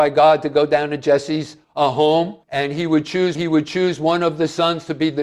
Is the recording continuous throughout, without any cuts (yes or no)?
no